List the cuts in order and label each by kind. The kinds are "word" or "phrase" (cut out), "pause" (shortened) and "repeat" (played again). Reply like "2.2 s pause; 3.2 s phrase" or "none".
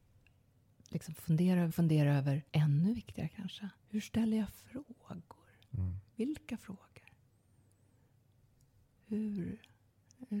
1.7 s phrase; 2.5 s pause; 3.8 s pause; 6.1 s pause